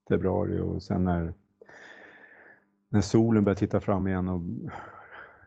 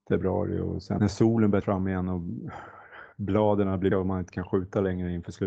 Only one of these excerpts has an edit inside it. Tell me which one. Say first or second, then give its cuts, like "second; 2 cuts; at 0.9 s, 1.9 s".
second; 4 cuts; at 1.0 s, 1.6 s, 3.1 s, 3.9 s